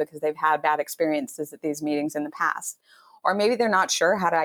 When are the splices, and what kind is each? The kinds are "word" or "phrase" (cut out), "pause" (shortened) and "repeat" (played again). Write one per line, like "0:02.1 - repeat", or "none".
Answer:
none